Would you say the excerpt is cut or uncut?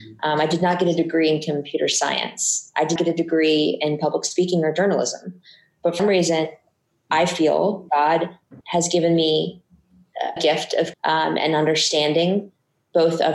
cut